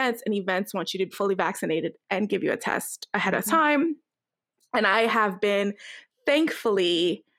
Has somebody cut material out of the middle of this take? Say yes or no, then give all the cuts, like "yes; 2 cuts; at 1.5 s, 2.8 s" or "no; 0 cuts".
yes; 1 cut; at 1.1 s